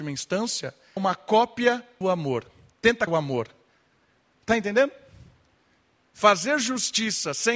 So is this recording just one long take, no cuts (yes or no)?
no